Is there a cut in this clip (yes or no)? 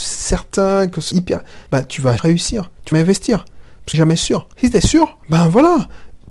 yes